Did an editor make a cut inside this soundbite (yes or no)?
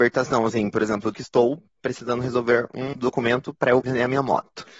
yes